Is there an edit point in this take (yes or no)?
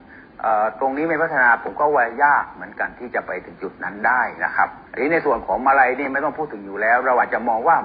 yes